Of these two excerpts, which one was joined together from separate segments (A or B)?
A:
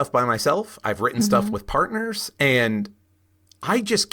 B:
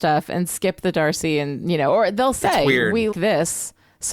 B